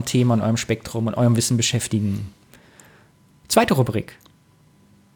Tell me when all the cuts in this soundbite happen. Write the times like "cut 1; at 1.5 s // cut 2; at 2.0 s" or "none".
none